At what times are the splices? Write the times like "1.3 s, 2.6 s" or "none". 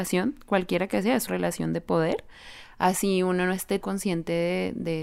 1.3 s, 3.8 s